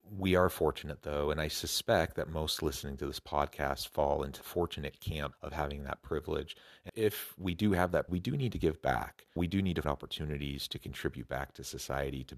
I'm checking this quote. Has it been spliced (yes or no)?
yes